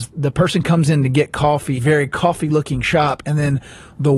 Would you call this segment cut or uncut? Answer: cut